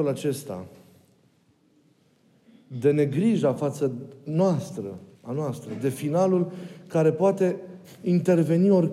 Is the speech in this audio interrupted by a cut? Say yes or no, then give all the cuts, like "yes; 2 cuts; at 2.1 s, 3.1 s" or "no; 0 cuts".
yes; 1 cut; at 5.2 s